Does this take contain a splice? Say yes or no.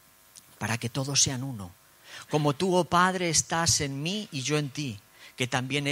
no